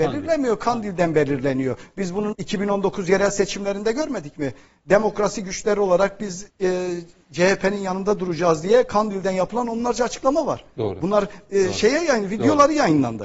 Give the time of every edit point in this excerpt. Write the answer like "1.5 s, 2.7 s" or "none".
2.3 s, 6.5 s